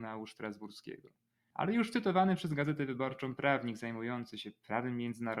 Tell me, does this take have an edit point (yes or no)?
no